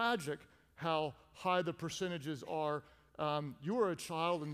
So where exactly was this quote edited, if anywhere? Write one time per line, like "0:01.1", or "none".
none